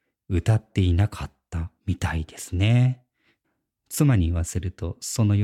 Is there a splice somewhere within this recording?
no; 0 cuts

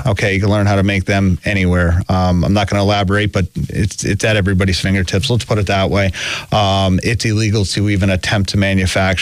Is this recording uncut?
yes; 0 cuts

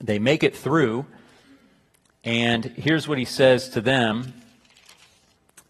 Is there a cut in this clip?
no; 0 cuts

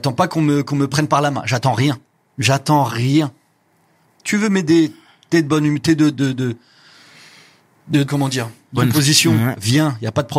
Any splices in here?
yes; 3 cuts; at 6.1 s, 8.0 s, 8.8 s

